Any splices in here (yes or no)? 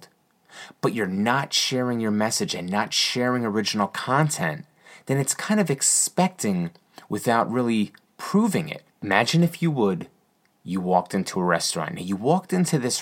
no